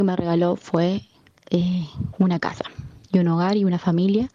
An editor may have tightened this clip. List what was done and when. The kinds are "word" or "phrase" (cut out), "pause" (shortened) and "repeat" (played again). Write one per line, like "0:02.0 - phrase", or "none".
none